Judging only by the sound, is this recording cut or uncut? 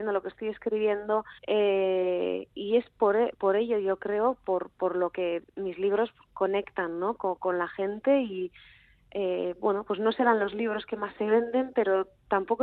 cut